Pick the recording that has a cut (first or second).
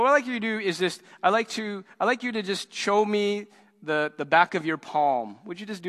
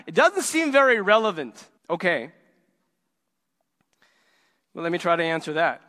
second